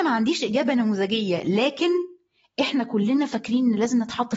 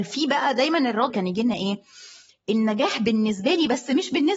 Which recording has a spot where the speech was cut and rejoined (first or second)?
second